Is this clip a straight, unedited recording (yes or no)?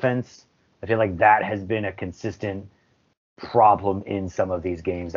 yes